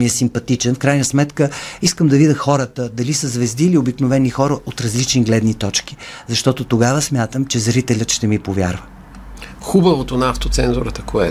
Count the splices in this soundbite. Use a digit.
0